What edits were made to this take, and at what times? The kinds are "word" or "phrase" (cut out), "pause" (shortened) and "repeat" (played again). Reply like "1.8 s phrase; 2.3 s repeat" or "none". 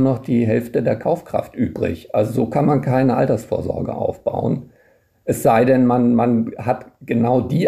none